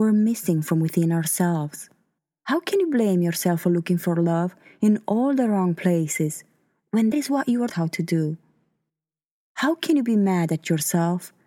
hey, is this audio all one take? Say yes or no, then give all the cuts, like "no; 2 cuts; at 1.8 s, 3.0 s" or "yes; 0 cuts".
no; 2 cuts; at 7.1 s, 7.7 s